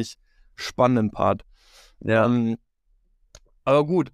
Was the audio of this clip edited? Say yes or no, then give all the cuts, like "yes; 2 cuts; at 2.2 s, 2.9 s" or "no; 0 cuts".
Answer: no; 0 cuts